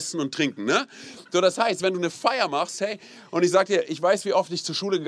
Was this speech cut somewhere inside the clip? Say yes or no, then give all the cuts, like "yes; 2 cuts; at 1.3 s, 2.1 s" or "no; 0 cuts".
no; 0 cuts